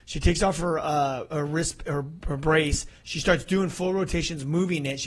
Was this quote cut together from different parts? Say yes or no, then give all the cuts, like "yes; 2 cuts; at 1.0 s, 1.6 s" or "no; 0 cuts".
no; 0 cuts